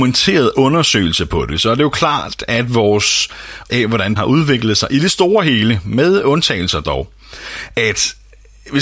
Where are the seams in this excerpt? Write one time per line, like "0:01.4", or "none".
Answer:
0:03.7
0:04.2
0:07.7